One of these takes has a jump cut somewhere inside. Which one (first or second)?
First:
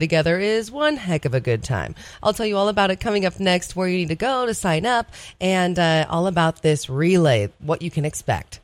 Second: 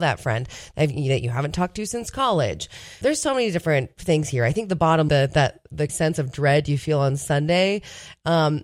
second